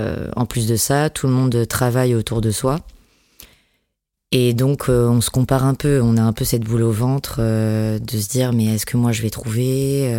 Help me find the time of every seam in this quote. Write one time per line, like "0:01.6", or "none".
none